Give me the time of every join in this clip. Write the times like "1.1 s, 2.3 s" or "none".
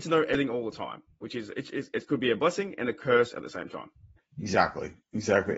4.2 s

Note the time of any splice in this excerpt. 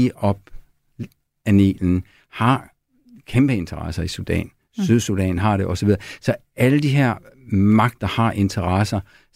none

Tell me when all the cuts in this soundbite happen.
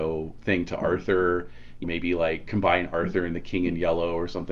1.8 s

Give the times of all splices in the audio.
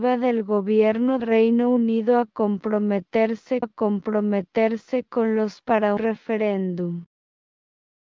1.2 s, 3.6 s, 5.6 s, 6.0 s

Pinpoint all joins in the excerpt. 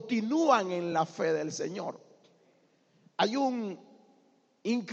none

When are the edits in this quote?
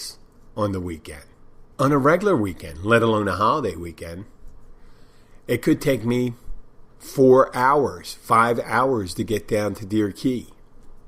1.7 s, 6.9 s

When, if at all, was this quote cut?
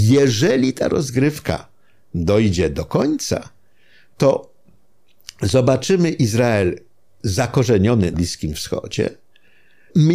8.1 s

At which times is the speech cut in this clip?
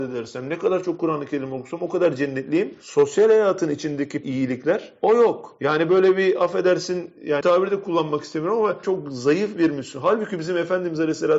4.2 s, 7.4 s, 8.8 s

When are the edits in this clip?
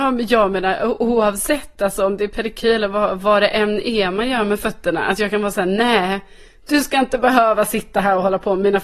none

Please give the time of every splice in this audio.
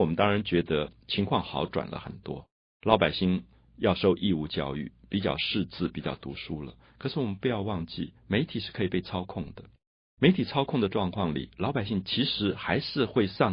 8.2 s

